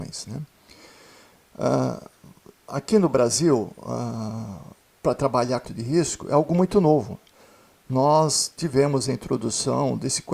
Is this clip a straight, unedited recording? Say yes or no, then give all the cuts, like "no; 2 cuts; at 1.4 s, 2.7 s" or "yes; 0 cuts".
no; 1 cut; at 5.6 s